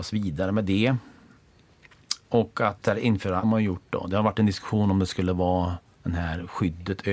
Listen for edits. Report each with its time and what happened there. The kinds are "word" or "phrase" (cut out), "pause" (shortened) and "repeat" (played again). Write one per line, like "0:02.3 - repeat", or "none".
0:02.8 - word
0:03.4 - phrase
0:05.9 - pause